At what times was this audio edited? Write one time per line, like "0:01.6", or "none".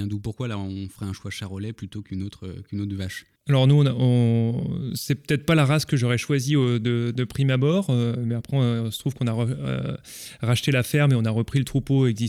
0:03.4